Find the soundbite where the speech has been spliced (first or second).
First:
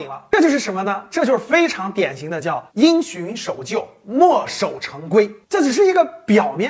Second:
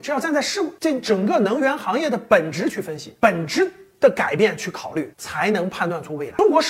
first